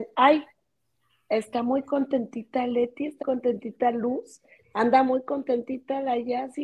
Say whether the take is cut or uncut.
cut